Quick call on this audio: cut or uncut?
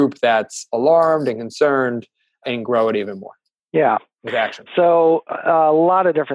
uncut